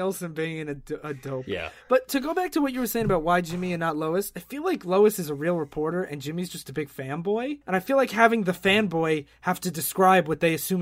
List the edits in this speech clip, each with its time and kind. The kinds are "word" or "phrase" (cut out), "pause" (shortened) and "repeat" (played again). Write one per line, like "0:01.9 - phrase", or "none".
0:07.6 - pause